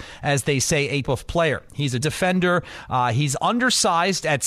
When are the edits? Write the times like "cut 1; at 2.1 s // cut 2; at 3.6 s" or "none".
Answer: cut 1; at 1.0 s // cut 2; at 2.0 s